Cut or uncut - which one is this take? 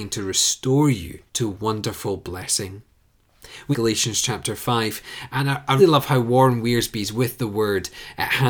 cut